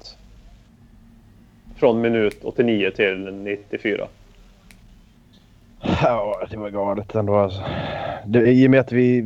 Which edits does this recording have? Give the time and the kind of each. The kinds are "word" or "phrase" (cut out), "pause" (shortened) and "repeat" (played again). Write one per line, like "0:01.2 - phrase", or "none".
none